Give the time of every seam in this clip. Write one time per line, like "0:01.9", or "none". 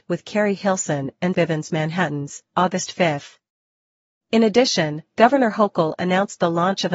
0:01.3